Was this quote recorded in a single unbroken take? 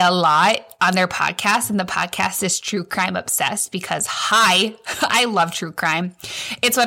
yes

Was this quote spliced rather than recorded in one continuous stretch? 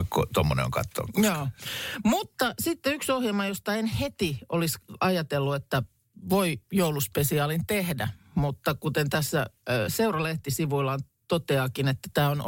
no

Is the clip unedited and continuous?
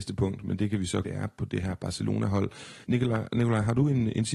no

